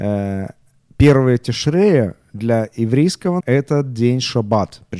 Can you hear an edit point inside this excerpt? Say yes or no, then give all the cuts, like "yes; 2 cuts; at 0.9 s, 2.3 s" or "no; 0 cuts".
yes; 1 cut; at 3.4 s